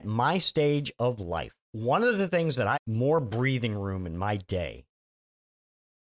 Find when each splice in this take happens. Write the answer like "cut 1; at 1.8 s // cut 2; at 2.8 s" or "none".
cut 1; at 1.6 s // cut 2; at 2.7 s